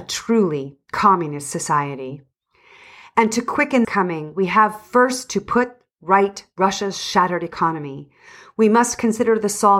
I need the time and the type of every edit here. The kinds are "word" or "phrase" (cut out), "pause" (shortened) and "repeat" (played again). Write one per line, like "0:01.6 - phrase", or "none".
0:03.8 - word

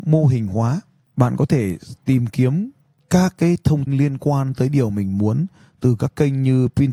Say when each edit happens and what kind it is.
0:03.9 - word

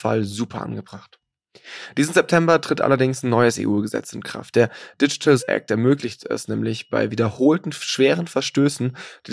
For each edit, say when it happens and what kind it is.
0:05.4 - word

